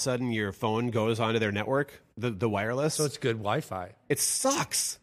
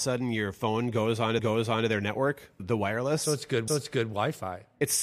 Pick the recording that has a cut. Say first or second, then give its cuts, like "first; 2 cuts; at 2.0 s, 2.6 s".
second; 3 cuts; at 1.4 s, 2.6 s, 3.7 s